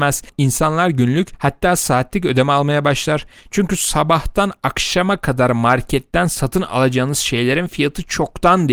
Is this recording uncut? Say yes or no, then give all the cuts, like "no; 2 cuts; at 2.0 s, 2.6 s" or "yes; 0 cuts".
yes; 0 cuts